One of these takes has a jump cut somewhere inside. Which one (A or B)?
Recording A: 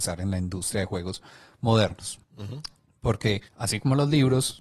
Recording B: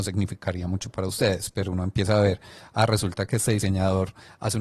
A